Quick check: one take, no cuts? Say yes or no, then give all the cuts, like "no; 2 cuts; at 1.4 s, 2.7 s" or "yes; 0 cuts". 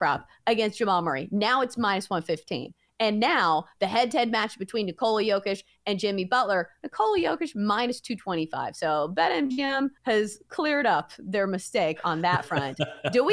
no; 1 cut; at 10.0 s